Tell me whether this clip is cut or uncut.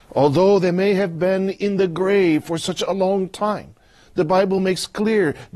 uncut